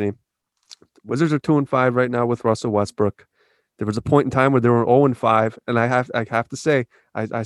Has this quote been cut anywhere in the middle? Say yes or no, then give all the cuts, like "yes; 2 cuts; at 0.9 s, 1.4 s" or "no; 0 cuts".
no; 0 cuts